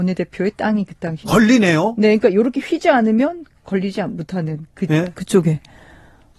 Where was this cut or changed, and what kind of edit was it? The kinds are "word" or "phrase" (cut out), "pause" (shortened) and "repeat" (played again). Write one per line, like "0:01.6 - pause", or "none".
0:01.2 - word